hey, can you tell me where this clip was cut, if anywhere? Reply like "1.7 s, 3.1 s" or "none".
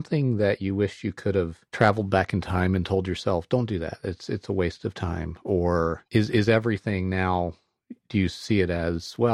1.7 s, 6.1 s